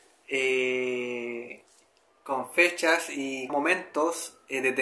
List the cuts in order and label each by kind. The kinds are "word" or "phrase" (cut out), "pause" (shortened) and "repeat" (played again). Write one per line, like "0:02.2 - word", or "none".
0:01.8 - pause
0:03.5 - word